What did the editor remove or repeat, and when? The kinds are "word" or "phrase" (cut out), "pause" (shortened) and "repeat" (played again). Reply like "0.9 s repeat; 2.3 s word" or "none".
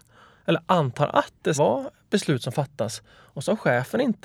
1.5 s word